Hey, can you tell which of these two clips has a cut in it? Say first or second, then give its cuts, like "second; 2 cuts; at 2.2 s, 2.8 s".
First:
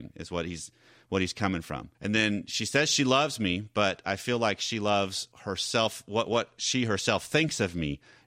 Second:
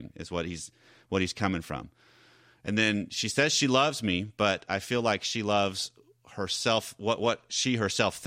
first; 2 cuts; at 1.9 s, 5.3 s